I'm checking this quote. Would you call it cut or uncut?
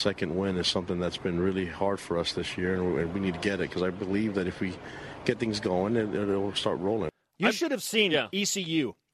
uncut